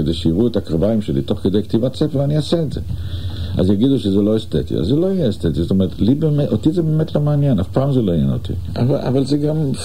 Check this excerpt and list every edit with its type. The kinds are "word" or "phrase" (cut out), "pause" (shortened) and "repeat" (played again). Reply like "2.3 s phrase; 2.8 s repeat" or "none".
none